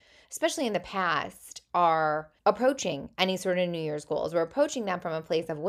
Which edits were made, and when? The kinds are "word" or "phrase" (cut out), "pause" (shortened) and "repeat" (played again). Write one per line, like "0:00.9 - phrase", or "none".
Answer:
0:02.4 - pause